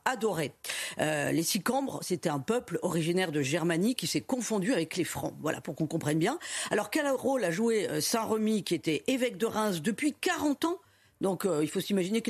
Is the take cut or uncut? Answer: uncut